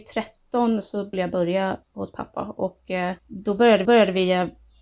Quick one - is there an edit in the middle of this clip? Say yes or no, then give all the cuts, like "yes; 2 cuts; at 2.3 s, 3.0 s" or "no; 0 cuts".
yes; 4 cuts; at 1.1 s, 1.8 s, 3.2 s, 3.8 s